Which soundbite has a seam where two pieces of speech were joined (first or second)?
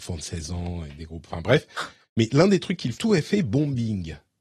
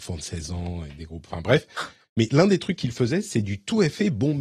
first